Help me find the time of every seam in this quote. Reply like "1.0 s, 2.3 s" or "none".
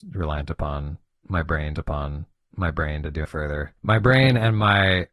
1.7 s, 3.2 s, 3.8 s